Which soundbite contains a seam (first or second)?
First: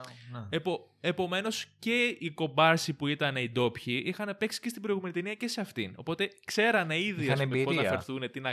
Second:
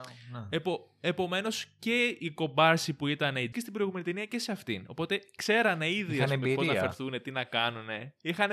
second